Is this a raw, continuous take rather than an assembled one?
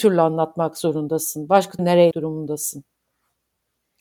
no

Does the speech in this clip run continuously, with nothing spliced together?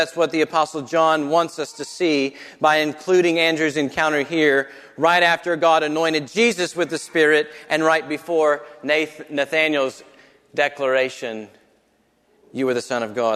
yes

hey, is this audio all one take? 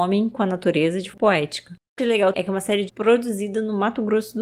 no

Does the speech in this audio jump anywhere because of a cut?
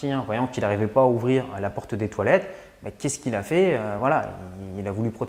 no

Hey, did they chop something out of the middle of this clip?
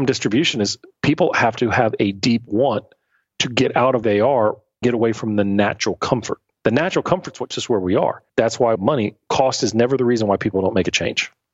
yes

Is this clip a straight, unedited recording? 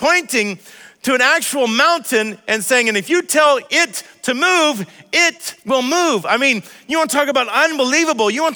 no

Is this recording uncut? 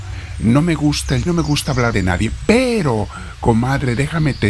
no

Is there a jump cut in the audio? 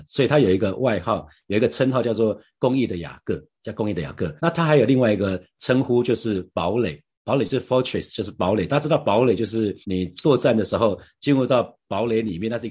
yes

